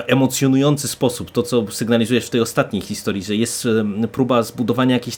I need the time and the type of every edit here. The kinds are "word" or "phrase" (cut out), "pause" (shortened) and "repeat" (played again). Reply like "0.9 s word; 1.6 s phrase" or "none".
none